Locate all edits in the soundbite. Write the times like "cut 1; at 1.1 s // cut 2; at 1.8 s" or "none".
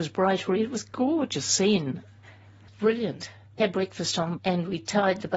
cut 1; at 2.7 s // cut 2; at 3.6 s // cut 3; at 4.4 s